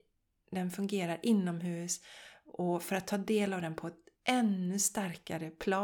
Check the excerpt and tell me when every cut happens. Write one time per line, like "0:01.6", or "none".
0:04.1